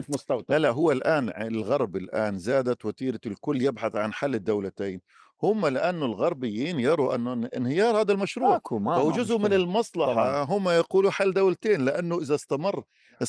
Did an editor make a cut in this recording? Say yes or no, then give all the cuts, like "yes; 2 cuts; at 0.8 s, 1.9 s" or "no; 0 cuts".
no; 0 cuts